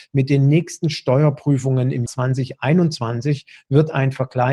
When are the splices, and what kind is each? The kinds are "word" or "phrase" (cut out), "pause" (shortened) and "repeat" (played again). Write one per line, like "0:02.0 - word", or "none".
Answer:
0:02.1 - word